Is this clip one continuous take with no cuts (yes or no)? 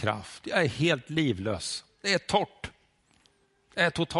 yes